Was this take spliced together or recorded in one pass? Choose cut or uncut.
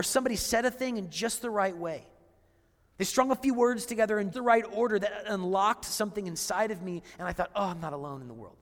cut